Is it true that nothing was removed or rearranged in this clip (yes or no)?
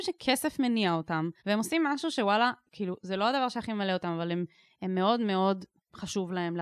no